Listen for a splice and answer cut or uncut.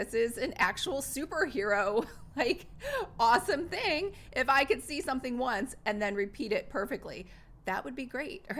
uncut